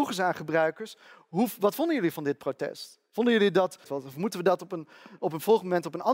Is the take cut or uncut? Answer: cut